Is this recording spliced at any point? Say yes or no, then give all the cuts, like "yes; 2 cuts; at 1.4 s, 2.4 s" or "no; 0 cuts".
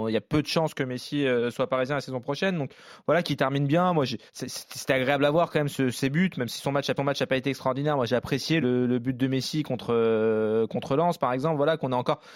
yes; 3 cuts; at 4.3 s, 7.0 s, 8.6 s